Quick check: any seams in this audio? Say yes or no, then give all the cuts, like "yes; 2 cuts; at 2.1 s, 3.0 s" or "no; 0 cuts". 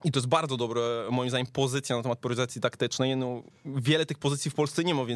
no; 0 cuts